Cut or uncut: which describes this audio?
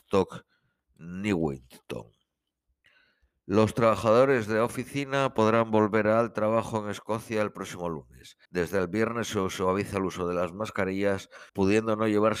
cut